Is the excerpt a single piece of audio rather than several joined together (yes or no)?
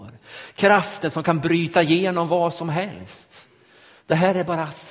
yes